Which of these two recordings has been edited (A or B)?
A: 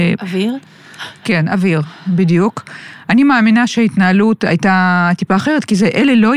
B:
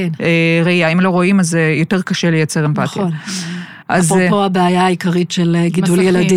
B